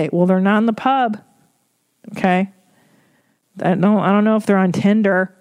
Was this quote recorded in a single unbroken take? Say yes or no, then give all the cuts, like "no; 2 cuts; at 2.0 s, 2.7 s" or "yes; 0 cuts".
yes; 0 cuts